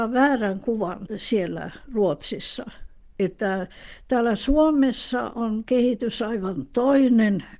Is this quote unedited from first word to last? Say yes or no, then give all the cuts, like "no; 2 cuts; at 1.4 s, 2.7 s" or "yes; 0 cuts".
yes; 0 cuts